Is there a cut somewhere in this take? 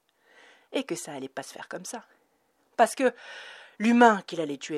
no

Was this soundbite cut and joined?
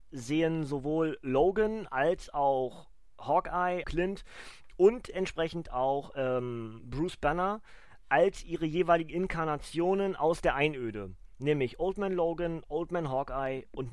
yes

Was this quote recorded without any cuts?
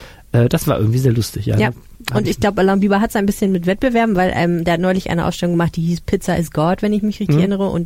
yes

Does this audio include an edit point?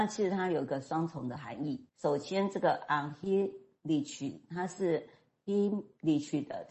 yes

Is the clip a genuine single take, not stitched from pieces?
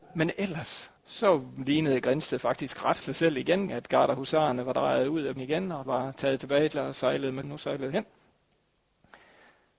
no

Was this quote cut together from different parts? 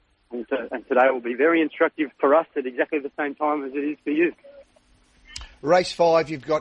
yes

